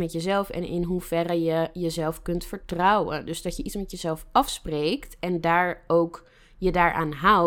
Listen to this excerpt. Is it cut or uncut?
uncut